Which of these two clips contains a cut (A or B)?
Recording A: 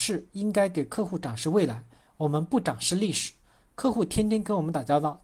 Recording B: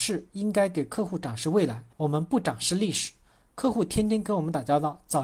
B